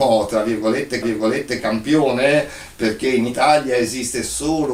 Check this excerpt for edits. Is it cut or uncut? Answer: cut